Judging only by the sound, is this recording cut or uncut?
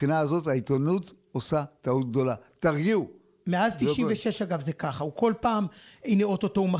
uncut